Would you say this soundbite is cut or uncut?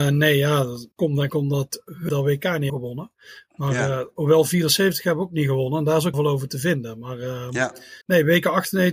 cut